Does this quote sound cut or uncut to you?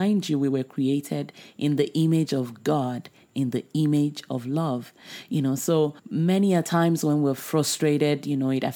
cut